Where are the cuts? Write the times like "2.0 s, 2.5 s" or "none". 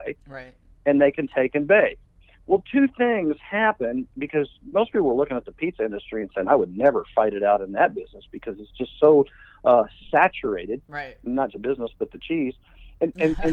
11.5 s

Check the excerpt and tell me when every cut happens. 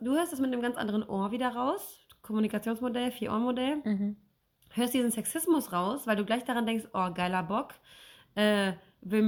none

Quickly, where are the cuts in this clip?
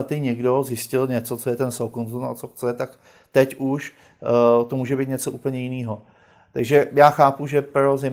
none

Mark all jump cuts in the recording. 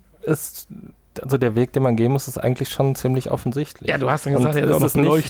none

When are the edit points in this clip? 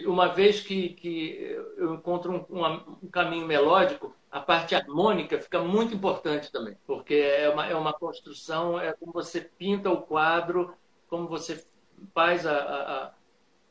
6.8 s, 12.1 s

